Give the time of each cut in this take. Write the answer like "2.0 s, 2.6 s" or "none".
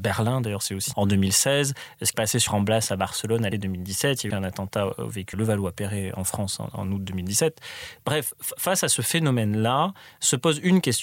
0.9 s, 2.1 s, 2.5 s, 3.5 s, 4.3 s, 5.3 s